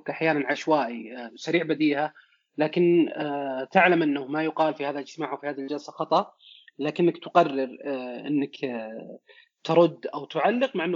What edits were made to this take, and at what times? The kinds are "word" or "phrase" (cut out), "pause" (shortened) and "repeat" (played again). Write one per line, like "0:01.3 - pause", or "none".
none